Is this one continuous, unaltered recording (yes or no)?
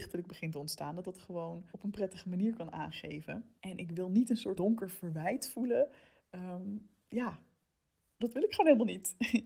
no